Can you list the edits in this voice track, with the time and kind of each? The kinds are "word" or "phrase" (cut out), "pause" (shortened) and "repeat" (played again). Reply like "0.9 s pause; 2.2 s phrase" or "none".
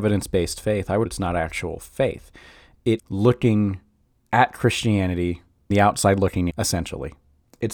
1.1 s word; 3.0 s word; 5.7 s word; 6.5 s word